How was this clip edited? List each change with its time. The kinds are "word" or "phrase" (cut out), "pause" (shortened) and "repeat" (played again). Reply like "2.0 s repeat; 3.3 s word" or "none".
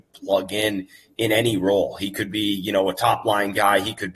none